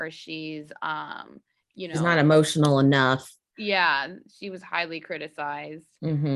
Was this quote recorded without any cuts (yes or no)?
yes